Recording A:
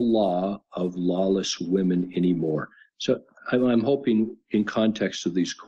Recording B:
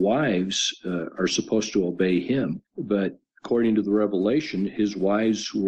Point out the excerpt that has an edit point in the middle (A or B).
B